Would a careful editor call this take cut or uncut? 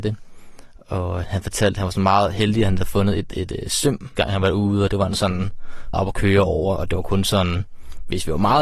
cut